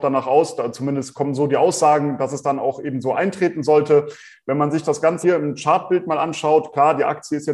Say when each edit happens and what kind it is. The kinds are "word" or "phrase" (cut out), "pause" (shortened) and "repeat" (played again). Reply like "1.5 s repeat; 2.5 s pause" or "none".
5.2 s word